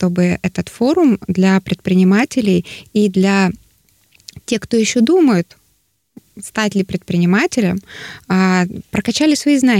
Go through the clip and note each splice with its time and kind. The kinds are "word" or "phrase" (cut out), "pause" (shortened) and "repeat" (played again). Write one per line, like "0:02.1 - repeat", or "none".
none